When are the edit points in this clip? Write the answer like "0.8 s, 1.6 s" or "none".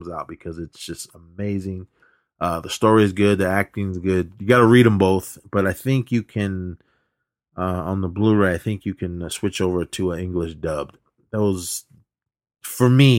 none